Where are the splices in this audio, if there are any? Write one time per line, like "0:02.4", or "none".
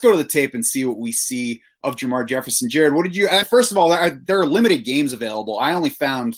0:03.4